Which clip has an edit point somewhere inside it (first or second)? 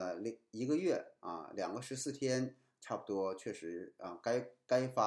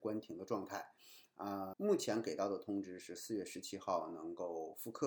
second